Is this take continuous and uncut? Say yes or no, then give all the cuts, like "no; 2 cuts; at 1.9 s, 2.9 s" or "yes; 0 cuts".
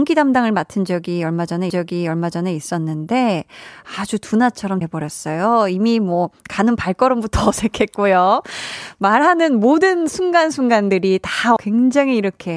no; 3 cuts; at 1.7 s, 4.8 s, 11.6 s